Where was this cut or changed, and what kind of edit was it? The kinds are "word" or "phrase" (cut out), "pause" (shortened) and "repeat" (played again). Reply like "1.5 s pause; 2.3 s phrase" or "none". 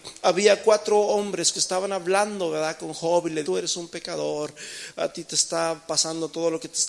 1.5 s phrase; 3.4 s word